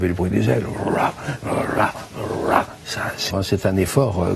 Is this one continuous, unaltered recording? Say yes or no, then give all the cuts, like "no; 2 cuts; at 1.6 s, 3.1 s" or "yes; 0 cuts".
no; 1 cut; at 3.3 s